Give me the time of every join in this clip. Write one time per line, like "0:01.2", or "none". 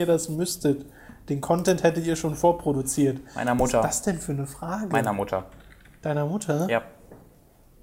none